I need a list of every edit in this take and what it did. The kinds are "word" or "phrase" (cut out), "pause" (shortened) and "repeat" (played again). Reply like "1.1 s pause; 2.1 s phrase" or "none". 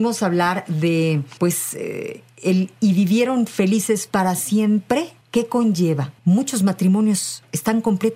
1.4 s pause; 5.2 s pause; 6.2 s pause